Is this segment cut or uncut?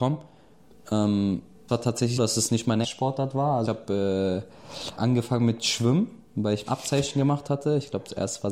cut